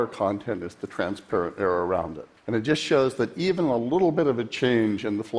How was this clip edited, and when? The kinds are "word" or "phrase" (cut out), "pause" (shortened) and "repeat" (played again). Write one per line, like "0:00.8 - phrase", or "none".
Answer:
0:02.4 - pause